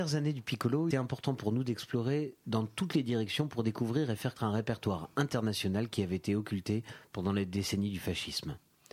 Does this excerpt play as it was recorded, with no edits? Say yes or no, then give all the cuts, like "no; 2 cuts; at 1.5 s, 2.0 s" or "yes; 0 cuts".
no; 2 cuts; at 0.9 s, 4.4 s